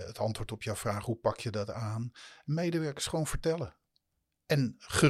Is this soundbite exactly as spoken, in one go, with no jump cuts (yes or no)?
yes